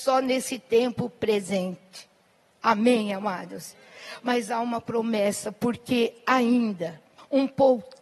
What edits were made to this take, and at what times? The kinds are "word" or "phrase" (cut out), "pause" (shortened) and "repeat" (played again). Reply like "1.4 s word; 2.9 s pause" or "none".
none